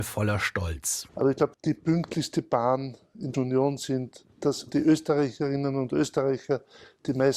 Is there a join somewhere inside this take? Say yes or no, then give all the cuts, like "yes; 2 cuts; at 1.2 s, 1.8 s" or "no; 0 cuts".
yes; 3 cuts; at 1.5 s, 3.3 s, 4.3 s